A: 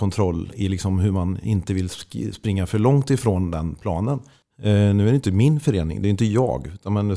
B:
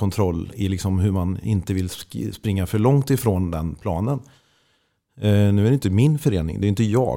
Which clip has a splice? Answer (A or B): A